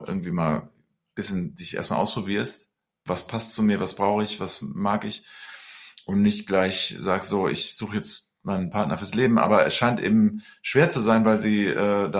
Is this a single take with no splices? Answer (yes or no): yes